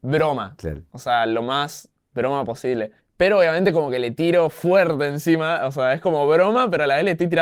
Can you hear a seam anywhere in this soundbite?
yes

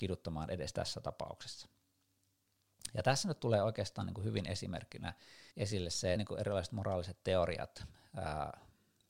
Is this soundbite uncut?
no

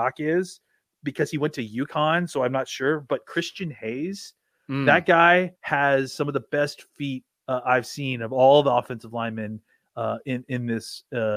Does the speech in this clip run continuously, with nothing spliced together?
no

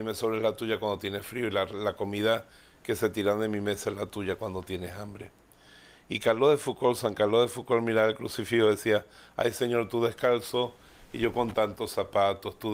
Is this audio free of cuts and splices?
yes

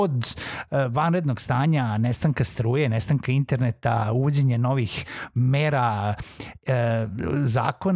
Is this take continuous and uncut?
yes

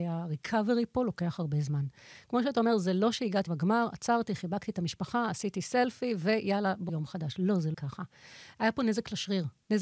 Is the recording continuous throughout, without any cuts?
no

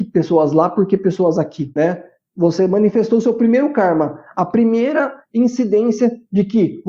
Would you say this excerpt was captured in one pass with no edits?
yes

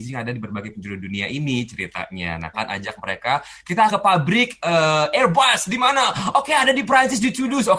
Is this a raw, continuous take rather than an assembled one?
no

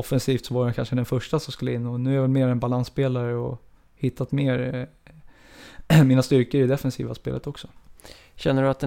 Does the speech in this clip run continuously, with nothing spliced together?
yes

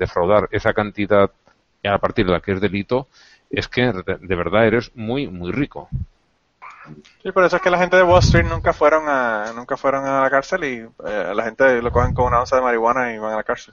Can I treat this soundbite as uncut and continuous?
yes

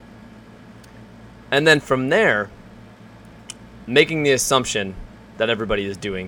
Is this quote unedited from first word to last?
yes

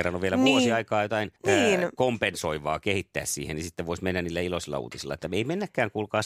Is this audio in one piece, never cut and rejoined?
no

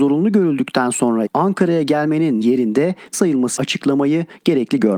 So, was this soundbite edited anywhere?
yes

